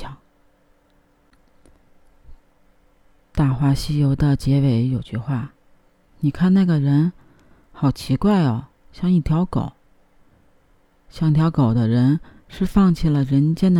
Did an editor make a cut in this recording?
no; 0 cuts

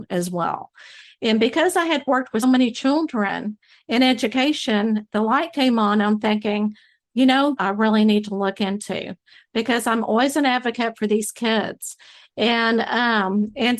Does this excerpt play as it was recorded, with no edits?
no; 2 cuts; at 2.4 s, 7.6 s

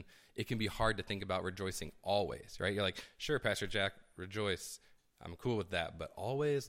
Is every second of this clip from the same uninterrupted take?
yes; 0 cuts

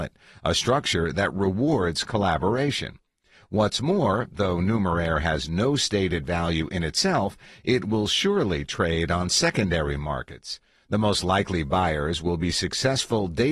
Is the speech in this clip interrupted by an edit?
no; 0 cuts

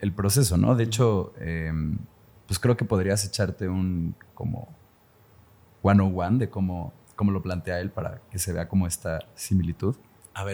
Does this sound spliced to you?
no; 0 cuts

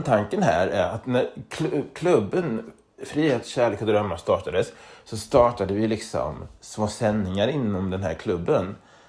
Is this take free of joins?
yes; 0 cuts

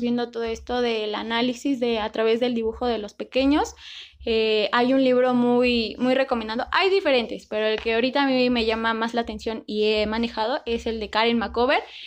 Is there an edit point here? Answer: no; 0 cuts

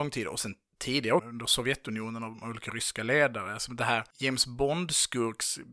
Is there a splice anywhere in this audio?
yes; 1 cut; at 1.2 s

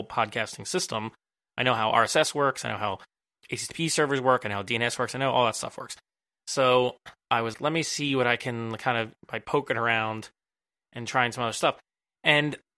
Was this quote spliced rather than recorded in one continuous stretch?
yes; 2 cuts; at 7.5 s, 9.2 s

